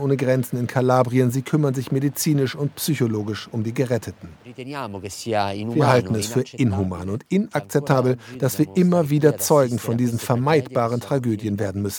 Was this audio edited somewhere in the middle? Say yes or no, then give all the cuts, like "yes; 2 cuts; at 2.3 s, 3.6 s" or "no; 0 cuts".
yes; 1 cut; at 4.4 s